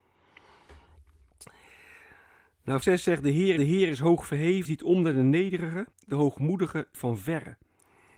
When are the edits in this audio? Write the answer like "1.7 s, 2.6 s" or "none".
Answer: 2.8 s, 3.6 s, 4.6 s, 5.9 s, 6.9 s